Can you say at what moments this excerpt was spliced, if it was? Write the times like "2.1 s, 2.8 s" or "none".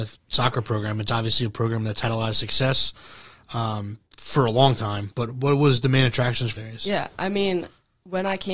4.1 s, 6.6 s